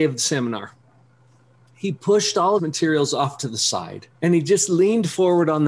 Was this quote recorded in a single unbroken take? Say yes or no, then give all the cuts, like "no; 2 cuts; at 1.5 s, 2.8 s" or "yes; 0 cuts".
no; 2 cuts; at 2.6 s, 4.1 s